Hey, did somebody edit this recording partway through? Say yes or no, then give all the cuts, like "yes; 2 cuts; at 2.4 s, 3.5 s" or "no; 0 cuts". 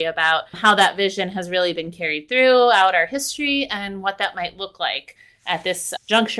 no; 0 cuts